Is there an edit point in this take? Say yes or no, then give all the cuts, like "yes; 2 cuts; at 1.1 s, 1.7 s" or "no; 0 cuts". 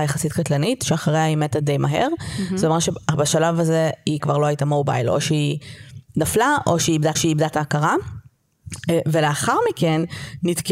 yes; 3 cuts; at 4.2 s, 6.1 s, 7.1 s